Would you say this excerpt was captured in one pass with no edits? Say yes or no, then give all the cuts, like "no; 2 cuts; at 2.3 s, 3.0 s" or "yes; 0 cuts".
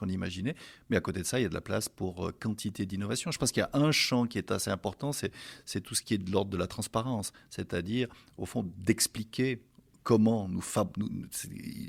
yes; 0 cuts